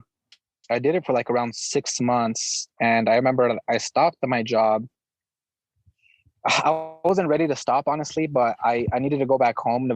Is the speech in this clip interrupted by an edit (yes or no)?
no